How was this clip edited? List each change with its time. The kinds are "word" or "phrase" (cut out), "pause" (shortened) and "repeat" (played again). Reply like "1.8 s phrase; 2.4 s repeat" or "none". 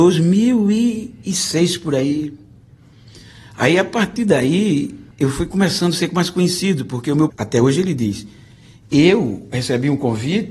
5.1 s pause; 7.3 s word